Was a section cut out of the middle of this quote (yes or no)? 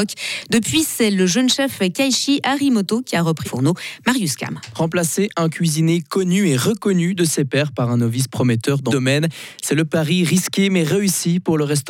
yes